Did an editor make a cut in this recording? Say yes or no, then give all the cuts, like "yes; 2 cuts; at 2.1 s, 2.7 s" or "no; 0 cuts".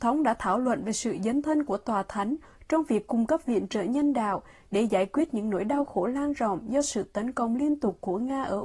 no; 0 cuts